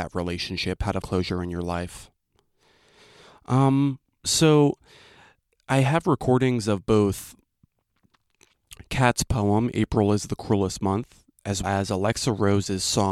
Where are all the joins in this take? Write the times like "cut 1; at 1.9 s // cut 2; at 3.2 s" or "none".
cut 1; at 1.0 s // cut 2; at 11.6 s